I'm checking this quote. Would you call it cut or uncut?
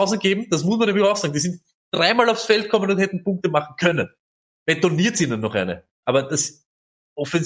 uncut